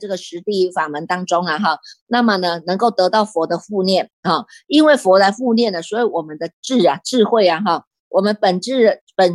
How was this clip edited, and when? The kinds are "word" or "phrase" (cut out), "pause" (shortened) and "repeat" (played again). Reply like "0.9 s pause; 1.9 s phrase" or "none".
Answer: none